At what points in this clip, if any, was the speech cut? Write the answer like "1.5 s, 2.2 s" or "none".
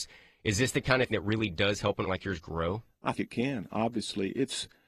1.1 s, 2.1 s, 3.1 s